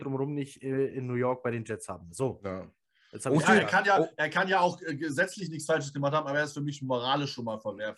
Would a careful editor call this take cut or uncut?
uncut